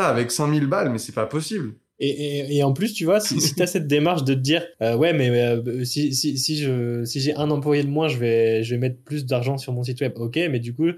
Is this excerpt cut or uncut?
cut